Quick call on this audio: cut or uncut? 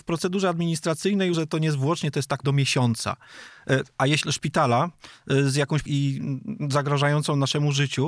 cut